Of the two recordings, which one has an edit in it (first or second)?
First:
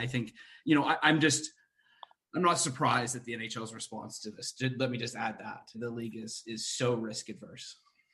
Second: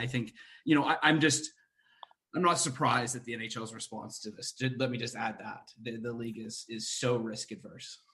first